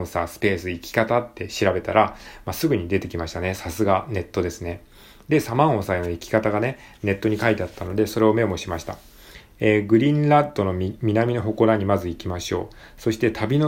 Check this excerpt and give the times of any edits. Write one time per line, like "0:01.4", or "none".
none